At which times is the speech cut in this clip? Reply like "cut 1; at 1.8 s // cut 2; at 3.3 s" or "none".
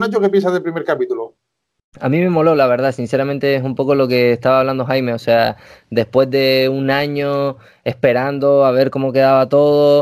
none